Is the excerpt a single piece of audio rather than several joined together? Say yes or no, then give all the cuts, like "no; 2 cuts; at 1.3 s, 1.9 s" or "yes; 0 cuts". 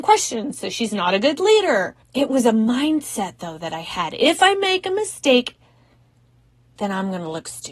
no; 1 cut; at 2.0 s